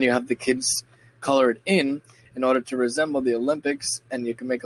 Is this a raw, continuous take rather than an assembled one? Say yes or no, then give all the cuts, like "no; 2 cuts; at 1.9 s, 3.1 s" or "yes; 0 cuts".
yes; 0 cuts